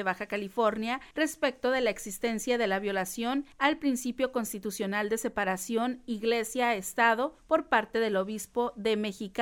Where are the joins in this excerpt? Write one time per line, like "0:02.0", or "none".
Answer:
0:01.1
0:03.5
0:07.4